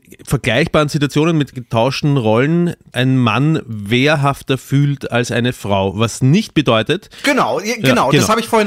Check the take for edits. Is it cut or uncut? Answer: cut